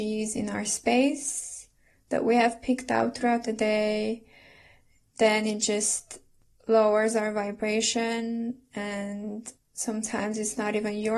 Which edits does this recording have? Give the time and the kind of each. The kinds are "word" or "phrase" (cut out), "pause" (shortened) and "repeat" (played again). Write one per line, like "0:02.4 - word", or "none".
0:09.6 - pause